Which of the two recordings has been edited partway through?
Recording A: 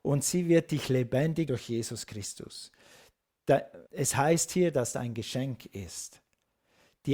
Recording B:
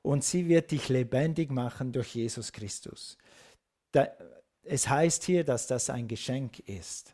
A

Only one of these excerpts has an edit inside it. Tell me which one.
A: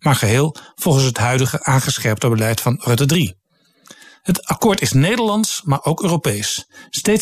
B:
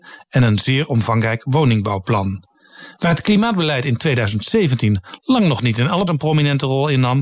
B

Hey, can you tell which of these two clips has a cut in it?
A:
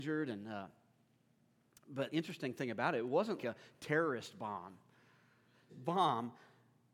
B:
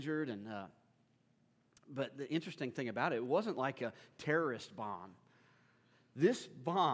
A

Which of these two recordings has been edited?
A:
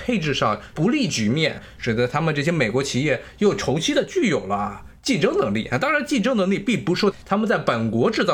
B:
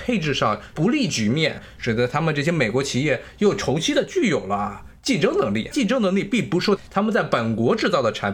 B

